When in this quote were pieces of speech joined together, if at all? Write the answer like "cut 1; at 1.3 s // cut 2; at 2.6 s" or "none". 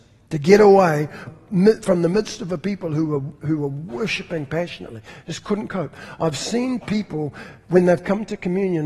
cut 1; at 1.3 s